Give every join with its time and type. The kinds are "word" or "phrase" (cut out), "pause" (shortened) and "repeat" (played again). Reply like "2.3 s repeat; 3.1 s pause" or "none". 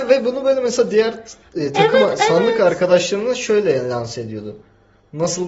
none